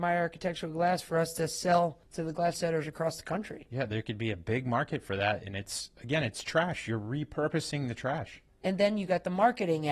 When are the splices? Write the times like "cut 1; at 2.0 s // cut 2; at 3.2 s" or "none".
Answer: cut 1; at 2.5 s